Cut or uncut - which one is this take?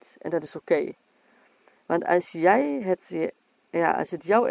uncut